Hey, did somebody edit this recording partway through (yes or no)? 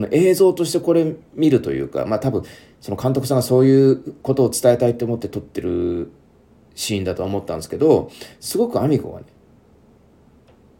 no